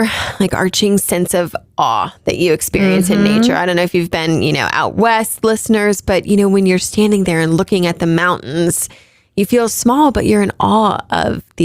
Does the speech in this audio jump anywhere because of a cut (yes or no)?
yes